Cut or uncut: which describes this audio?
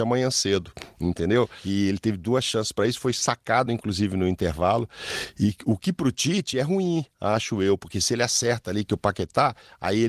uncut